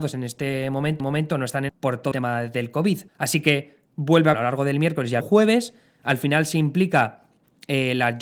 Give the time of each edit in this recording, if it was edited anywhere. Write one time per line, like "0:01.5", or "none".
0:01.0
0:01.7
0:02.1
0:03.1
0:03.8
0:04.3
0:05.2